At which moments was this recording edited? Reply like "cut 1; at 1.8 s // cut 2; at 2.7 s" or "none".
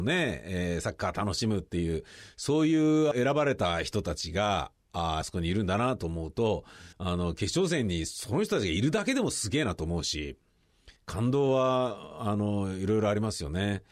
cut 1; at 3.1 s // cut 2; at 5.2 s // cut 3; at 6.9 s // cut 4; at 11.0 s